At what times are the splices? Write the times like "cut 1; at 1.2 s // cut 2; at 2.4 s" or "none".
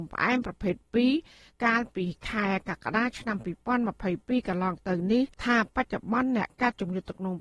cut 1; at 5.3 s